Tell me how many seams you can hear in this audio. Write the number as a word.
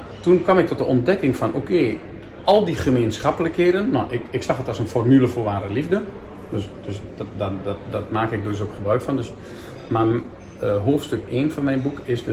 zero